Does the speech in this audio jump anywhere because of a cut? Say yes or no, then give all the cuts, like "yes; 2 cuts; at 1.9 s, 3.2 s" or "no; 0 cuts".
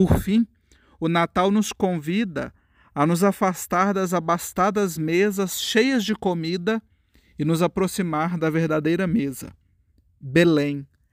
no; 0 cuts